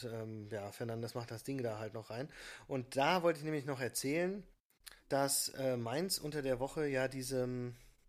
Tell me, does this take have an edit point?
yes; 1 cut; at 5.0 s

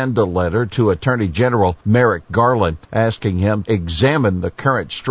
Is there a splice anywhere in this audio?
yes; 3 cuts; at 1.8 s, 2.8 s, 3.6 s

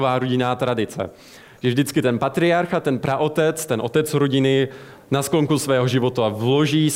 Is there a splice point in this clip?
no; 0 cuts

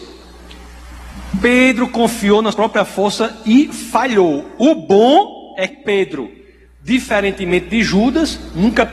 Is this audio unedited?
no; 2 cuts; at 2.5 s, 5.7 s

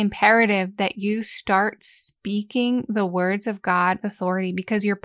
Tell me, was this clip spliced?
yes; 1 cut; at 4.0 s

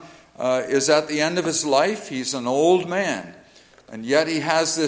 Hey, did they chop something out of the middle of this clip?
no; 0 cuts

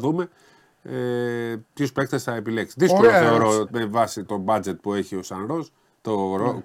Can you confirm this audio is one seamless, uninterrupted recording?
no; 2 cuts; at 3.7 s, 4.2 s

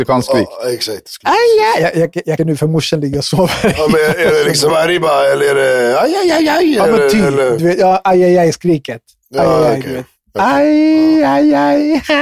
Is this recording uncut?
no; 2 cuts; at 2.4 s, 4.7 s

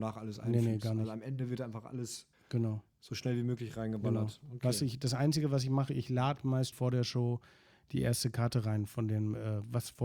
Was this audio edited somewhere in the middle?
yes; 2 cuts; at 2.3 s, 6.7 s

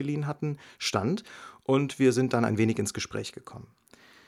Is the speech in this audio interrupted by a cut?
no; 0 cuts

